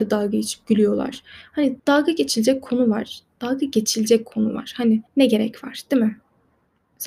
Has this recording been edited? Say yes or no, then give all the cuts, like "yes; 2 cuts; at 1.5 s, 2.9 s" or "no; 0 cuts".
yes; 2 cuts; at 1.8 s, 5.1 s